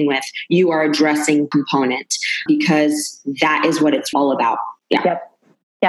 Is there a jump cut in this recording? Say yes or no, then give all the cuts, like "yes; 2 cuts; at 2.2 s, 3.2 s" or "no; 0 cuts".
yes; 4 cuts; at 1.5 s, 2.5 s, 4.1 s, 4.8 s